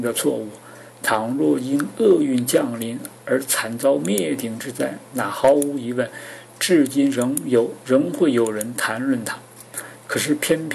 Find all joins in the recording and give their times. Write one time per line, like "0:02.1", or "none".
0:03.2